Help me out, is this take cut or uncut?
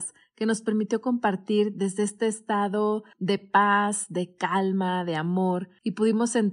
uncut